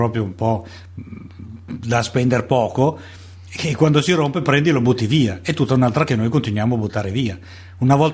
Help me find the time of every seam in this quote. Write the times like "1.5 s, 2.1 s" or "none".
6.1 s